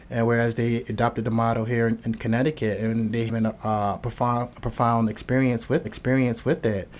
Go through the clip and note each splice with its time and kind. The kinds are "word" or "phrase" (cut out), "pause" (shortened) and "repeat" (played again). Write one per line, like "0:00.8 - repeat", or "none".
0:03.3 - word
0:05.8 - repeat